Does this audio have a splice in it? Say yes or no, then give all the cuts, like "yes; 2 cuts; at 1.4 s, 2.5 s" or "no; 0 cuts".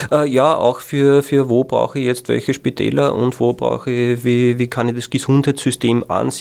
no; 0 cuts